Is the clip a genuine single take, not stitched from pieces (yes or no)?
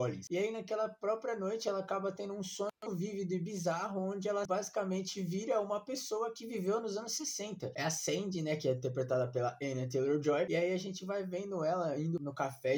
no